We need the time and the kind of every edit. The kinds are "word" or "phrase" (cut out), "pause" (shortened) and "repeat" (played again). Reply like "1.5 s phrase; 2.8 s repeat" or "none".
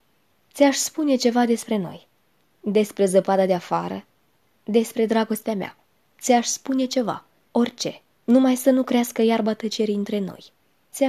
none